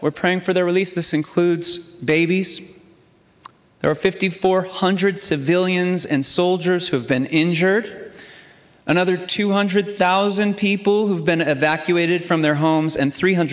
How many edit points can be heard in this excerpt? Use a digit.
0